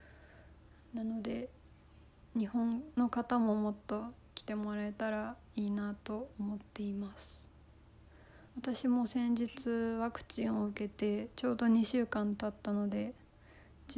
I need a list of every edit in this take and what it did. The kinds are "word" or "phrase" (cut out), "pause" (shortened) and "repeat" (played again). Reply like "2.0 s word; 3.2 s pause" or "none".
8.5 s pause